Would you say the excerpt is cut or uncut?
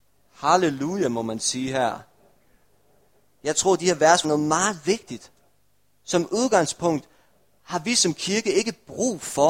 cut